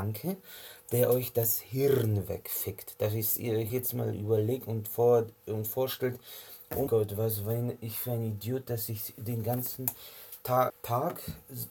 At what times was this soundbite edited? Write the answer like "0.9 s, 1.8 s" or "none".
3.7 s, 6.9 s, 10.7 s